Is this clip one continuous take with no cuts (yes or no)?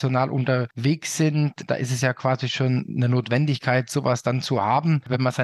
yes